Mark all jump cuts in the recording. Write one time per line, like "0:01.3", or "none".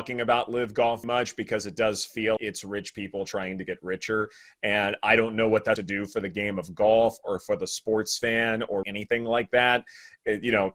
0:01.0
0:02.4
0:05.8
0:08.8